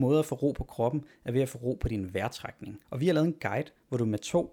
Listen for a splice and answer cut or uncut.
cut